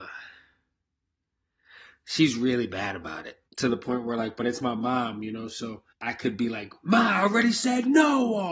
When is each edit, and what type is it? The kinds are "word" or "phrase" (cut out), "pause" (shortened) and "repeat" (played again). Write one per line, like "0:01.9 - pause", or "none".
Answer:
0:03.5 - pause
0:05.9 - pause